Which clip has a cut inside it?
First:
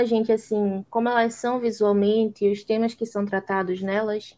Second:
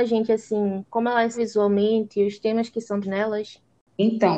second; 2 cuts; at 1.3 s, 3.0 s

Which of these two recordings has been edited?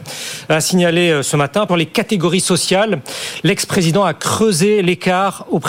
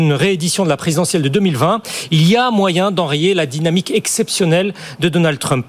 first; 1 cut; at 1.7 s

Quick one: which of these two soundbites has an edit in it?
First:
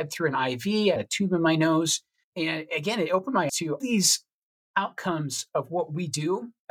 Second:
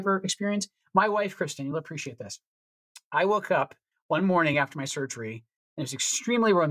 first; 4 cuts; at 1.0 s, 2.3 s, 3.5 s, 3.8 s

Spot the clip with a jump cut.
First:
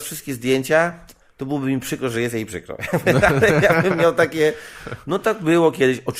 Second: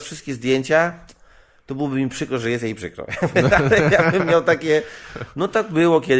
first; 1 cut; at 1.2 s

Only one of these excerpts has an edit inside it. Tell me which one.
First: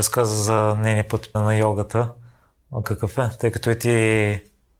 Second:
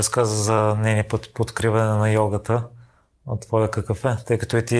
first; 2 cuts; at 1.3 s, 2.8 s

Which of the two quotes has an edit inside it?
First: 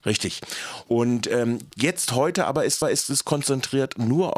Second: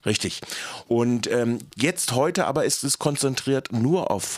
first; 1 cut; at 2.8 s

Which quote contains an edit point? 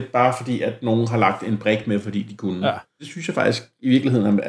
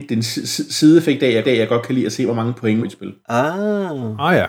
second; 2 cuts; at 1.4 s, 2.8 s

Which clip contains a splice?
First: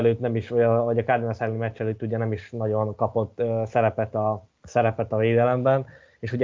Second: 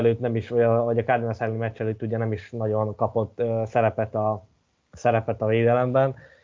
first; 1 cut; at 4.5 s

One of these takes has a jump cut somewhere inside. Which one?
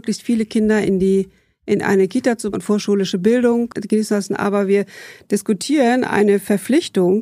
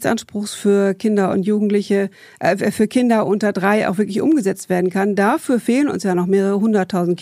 first; 2 cuts; at 2.5 s, 3.7 s

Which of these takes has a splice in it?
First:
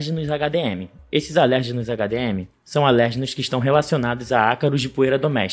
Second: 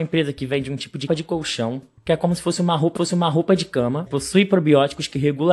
second; 3 cuts; at 1.1 s, 3.0 s, 4.1 s

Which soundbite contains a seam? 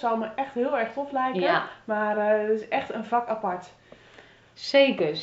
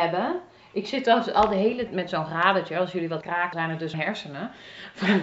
second; 4 cuts; at 1.9 s, 3.2 s, 3.5 s, 3.9 s

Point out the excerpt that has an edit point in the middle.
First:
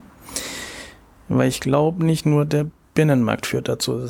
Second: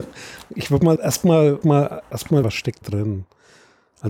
second; 4 cuts; at 1.0 s, 1.6 s, 2.4 s, 2.8 s

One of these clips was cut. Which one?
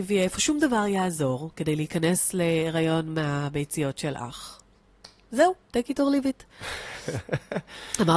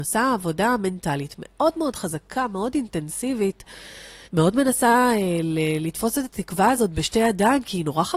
second; 1 cut; at 4.2 s

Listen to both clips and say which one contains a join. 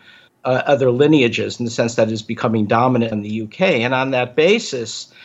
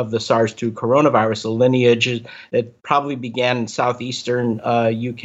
first; 1 cut; at 3.1 s

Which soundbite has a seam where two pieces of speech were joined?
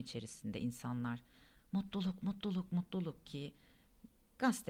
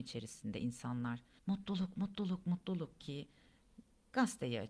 second; 1 cut; at 1.4 s

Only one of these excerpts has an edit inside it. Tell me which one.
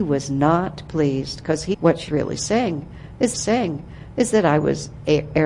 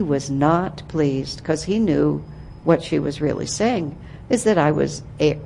first; 3 cuts; at 1.7 s, 2.1 s, 3.3 s

